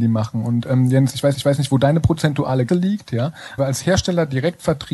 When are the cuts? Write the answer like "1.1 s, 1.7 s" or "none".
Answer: 1.3 s, 2.7 s, 3.6 s